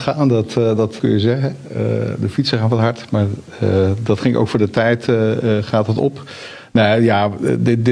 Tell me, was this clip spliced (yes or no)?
yes